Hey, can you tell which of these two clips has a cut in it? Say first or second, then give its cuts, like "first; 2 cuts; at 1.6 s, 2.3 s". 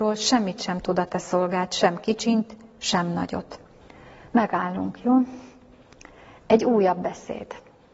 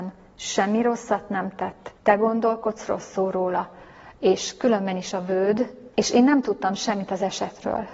second; 2 cuts; at 2.0 s, 5.9 s